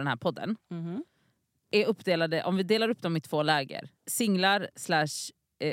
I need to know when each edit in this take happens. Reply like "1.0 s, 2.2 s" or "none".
4.0 s